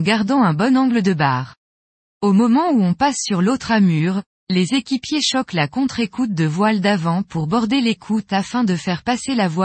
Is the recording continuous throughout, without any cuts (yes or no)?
yes